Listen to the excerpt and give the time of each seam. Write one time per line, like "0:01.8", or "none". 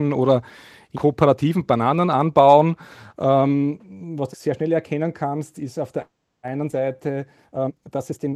0:00.9
0:04.3
0:06.2